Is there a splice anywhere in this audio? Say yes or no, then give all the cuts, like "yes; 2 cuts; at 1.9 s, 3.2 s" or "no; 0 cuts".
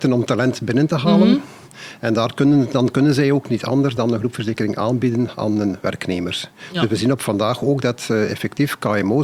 no; 0 cuts